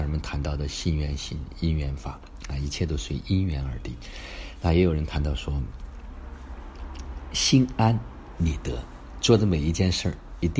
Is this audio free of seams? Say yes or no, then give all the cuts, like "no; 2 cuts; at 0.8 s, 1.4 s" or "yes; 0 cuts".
yes; 0 cuts